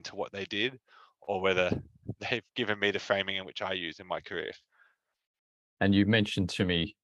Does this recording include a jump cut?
no; 0 cuts

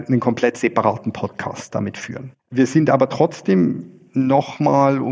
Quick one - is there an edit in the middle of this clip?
yes; 1 cut; at 2.4 s

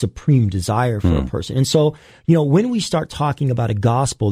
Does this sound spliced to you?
no; 0 cuts

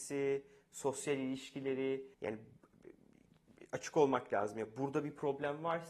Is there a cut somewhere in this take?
yes; 1 cut; at 2.1 s

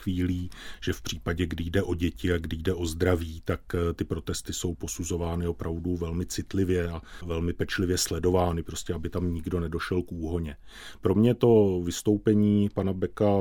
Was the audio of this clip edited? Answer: no; 0 cuts

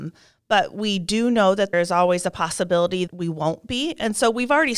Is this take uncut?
no; 2 cuts; at 1.7 s, 3.1 s

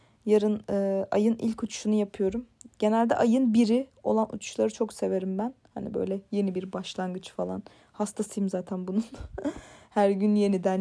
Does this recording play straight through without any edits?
yes; 0 cuts

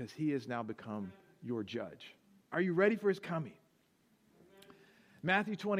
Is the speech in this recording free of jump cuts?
no; 1 cut; at 2.4 s

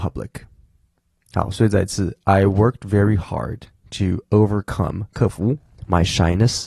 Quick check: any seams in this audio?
no; 0 cuts

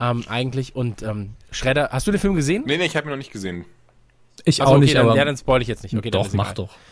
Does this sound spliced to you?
no; 0 cuts

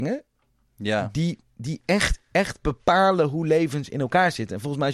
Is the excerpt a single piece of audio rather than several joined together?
no; 1 cut; at 2.2 s

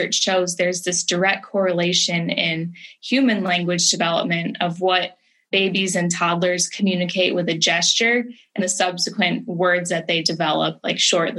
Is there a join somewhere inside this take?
yes; 1 cut; at 8.6 s

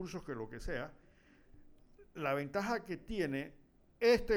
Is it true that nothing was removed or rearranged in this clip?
yes; 0 cuts

